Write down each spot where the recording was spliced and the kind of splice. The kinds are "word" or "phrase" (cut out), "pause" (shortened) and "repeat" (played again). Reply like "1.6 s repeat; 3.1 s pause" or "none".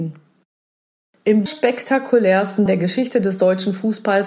1.5 s word; 2.7 s word

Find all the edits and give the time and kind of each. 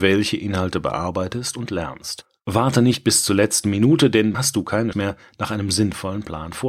4.3 s word; 4.9 s word

